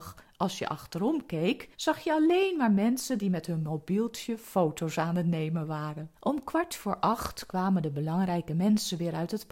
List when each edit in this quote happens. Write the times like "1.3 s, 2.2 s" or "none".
1.7 s, 6.1 s